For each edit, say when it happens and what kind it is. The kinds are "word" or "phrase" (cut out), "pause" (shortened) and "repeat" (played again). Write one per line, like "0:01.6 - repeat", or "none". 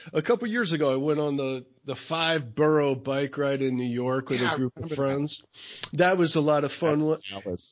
none